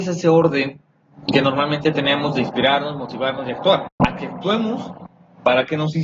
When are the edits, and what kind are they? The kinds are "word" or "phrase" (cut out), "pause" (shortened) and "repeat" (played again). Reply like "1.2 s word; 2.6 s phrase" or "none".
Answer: none

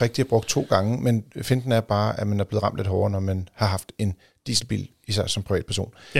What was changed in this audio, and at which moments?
none

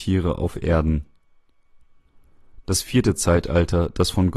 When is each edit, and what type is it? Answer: none

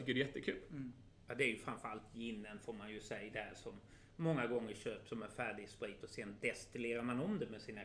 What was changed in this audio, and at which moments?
1.2 s pause

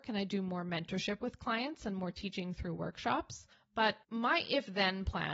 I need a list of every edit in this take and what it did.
1.2 s word

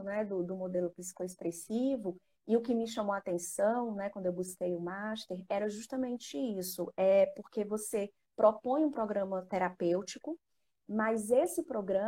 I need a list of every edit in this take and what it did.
none

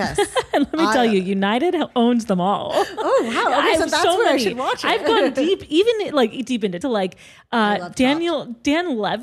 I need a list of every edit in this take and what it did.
6.8 s phrase

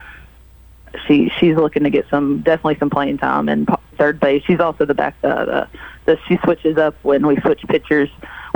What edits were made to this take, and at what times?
3.9 s word

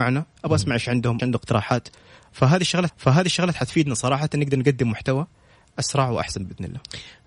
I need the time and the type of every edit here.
1.2 s phrase; 2.9 s repeat

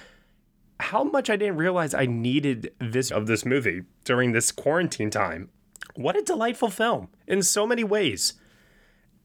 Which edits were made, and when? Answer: 3.1 s word; 7.2 s pause

